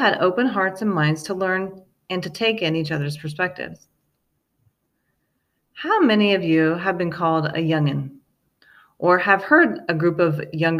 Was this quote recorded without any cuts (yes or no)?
yes